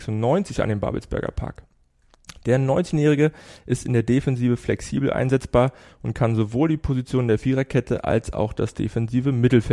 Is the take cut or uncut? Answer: uncut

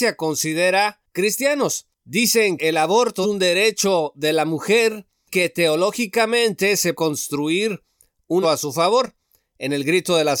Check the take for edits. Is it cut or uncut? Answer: cut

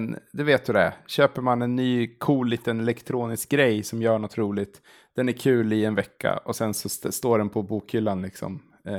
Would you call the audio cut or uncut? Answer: uncut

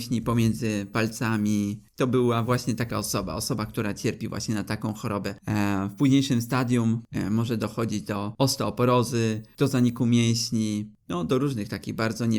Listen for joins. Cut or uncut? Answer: uncut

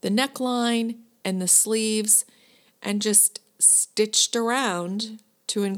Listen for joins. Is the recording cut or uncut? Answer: uncut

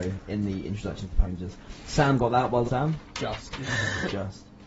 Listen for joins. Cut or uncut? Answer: cut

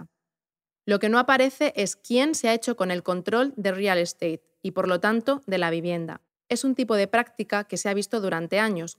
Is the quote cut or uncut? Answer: cut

